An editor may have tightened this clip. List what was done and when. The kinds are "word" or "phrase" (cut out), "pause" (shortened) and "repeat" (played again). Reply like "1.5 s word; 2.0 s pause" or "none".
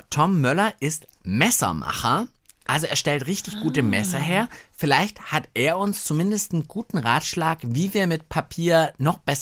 none